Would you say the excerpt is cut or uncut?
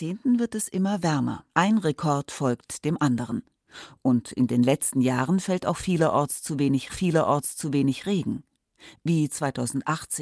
cut